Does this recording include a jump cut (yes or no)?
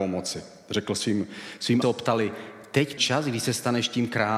yes